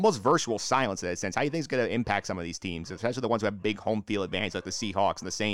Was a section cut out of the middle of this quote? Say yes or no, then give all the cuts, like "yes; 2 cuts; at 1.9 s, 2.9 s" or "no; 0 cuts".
no; 0 cuts